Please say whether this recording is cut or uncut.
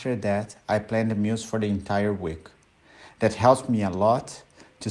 uncut